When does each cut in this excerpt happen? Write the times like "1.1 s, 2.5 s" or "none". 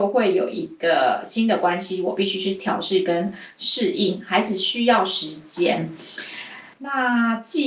6.7 s

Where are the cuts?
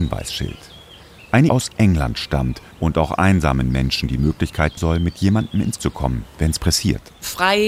1.5 s, 2.7 s, 4.8 s, 5.8 s

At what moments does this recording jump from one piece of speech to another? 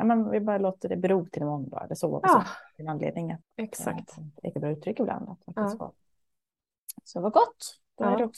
3.4 s, 4.5 s

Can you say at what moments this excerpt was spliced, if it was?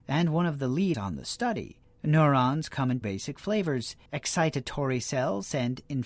0.9 s, 1.8 s, 3.0 s, 4.1 s

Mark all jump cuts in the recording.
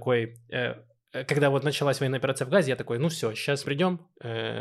3.6 s

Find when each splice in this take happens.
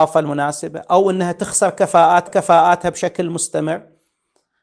2.3 s

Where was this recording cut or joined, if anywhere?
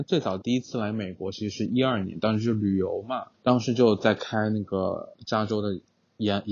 3.3 s

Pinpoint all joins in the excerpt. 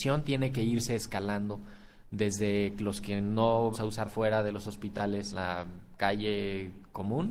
3.7 s, 4.1 s, 5.3 s

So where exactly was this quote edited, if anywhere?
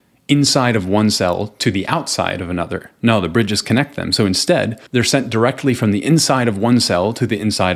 4.9 s

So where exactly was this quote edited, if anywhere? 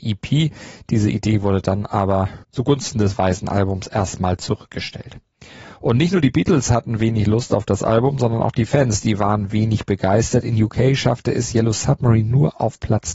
2.4 s

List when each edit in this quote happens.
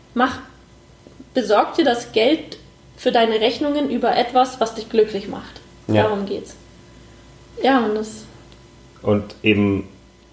none

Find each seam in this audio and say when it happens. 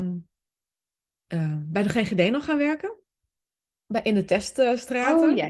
none

